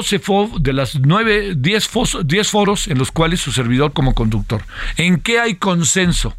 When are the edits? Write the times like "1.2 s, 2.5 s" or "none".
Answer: 3.9 s